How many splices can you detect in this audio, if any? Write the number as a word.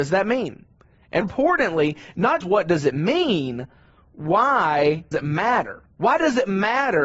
four